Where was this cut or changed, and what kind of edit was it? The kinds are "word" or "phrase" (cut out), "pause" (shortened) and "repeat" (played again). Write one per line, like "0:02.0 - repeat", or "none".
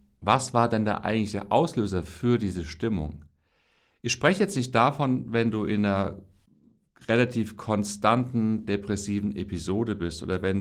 none